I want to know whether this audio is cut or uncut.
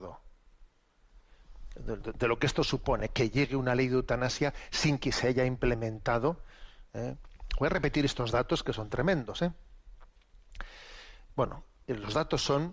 uncut